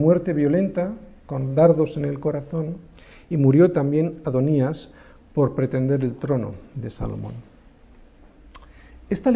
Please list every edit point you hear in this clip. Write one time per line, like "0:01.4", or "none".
none